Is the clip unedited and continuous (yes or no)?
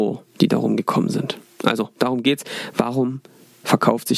yes